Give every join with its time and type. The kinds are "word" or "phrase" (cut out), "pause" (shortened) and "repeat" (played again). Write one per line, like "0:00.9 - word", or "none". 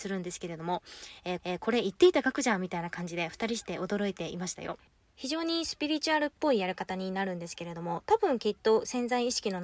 0:01.4 - repeat